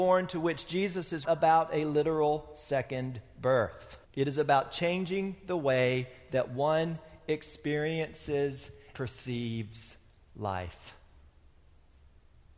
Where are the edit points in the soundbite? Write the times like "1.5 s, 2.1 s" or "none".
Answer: 1.2 s, 4.0 s, 8.9 s